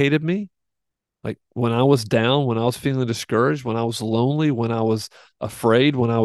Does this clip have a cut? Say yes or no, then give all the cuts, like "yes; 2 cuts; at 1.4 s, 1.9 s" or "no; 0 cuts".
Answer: no; 0 cuts